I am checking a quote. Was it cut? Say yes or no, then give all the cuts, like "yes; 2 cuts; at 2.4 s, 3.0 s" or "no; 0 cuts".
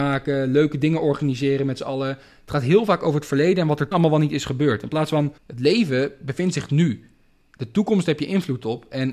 yes; 2 cuts; at 3.9 s, 5.4 s